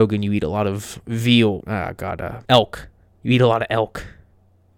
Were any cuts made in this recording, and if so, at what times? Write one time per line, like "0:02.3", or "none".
0:01.6
0:02.5